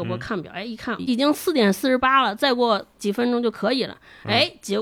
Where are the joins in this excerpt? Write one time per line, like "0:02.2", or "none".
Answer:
0:01.0